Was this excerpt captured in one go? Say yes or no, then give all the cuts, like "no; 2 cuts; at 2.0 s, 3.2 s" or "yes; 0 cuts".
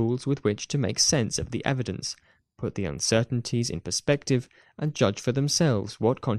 yes; 0 cuts